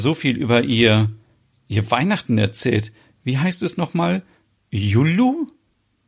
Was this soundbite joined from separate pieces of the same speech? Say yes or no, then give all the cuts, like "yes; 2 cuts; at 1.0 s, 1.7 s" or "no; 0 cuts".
no; 0 cuts